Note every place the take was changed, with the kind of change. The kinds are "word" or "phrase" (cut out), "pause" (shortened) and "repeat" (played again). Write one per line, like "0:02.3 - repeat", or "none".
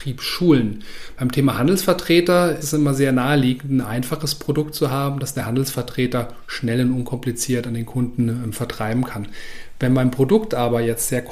0:02.6 - word